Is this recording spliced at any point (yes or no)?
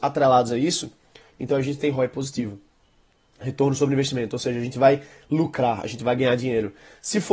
no